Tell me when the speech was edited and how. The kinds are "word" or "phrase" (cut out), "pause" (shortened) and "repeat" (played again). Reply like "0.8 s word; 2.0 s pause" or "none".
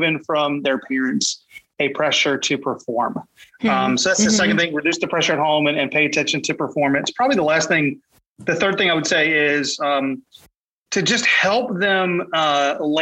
none